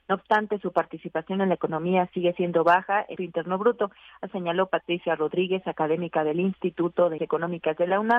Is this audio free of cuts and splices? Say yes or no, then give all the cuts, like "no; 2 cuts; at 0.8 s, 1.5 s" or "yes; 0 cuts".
no; 3 cuts; at 3.2 s, 4.3 s, 7.2 s